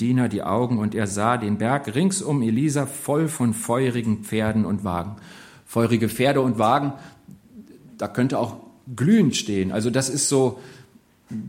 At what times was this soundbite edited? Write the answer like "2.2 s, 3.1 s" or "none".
none